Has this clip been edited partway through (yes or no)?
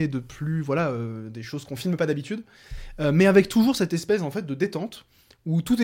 no